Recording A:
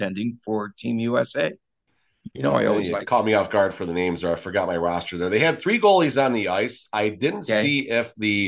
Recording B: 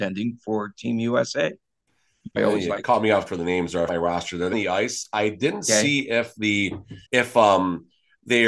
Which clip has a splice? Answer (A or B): B